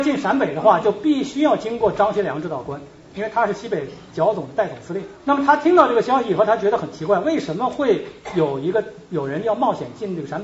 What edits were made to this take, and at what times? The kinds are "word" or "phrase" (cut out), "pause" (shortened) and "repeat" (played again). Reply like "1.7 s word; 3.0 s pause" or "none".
5.2 s pause

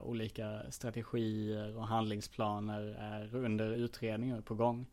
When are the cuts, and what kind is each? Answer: none

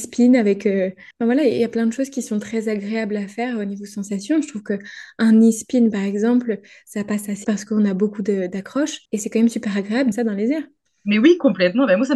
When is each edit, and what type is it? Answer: 1.1 s pause; 7.4 s word; 9.1 s pause; 10.1 s phrase

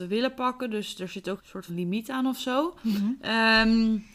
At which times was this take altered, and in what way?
1.4 s word; 1.7 s word

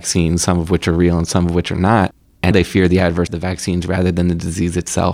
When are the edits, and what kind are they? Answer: 2.5 s word; 3.3 s word

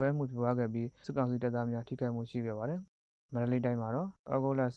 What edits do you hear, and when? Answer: 2.9 s pause

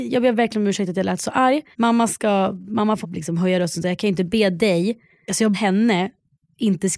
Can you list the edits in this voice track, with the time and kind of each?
1.7 s pause; 3.0 s word; 5.5 s word

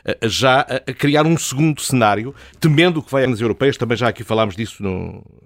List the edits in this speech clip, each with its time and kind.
2.5 s word; 3.3 s word

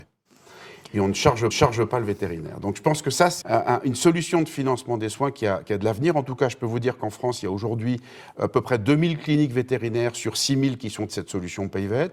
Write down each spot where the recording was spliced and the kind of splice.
1.5 s repeat; 3.4 s word; 11.1 s word

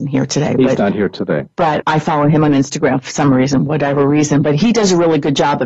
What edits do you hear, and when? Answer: 1.8 s word

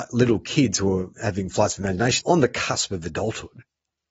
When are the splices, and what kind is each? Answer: 1.1 s pause; 2.2 s word

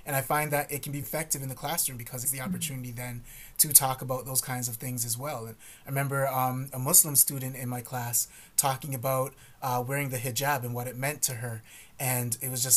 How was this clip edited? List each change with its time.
1.0 s word; 2.2 s phrase

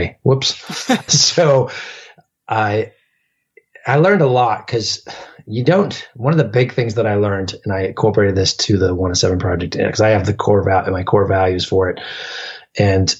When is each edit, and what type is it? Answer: 1.1 s word

